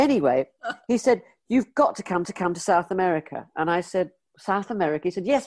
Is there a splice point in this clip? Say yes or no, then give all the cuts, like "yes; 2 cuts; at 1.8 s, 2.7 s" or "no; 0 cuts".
yes; 1 cut; at 2.2 s